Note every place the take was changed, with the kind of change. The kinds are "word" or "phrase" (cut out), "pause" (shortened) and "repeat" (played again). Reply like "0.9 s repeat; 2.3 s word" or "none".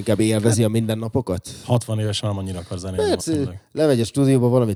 2.2 s word; 3.2 s word